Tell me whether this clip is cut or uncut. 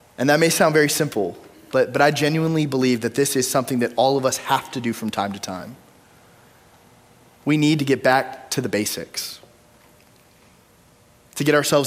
uncut